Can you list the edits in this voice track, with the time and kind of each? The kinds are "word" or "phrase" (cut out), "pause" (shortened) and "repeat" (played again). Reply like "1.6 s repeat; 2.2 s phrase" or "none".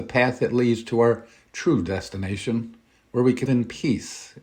3.5 s word